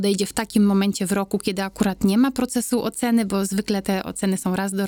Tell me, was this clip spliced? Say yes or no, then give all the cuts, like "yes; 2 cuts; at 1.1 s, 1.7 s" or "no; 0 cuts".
no; 0 cuts